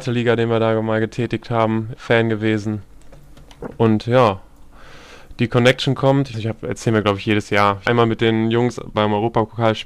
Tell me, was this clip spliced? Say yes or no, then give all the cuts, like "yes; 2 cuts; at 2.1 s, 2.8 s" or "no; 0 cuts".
yes; 4 cuts; at 1.9 s, 6.3 s, 7.9 s, 8.9 s